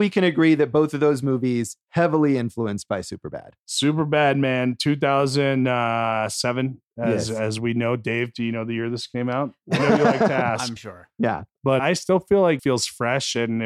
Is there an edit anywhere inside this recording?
yes; 3 cuts; at 10.8 s, 11.8 s, 12.6 s

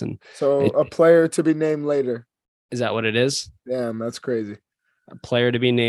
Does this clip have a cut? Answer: no; 0 cuts

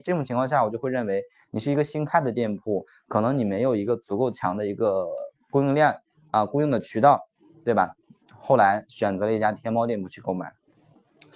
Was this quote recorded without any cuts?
yes; 0 cuts

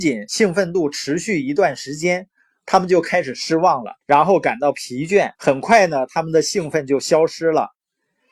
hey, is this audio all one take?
no; 2 cuts; at 4.0 s, 5.4 s

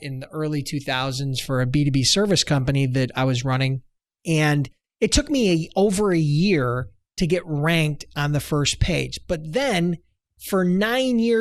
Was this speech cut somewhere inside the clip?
no; 0 cuts

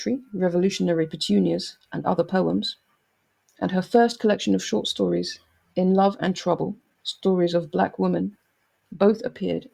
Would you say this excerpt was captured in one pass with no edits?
yes; 0 cuts

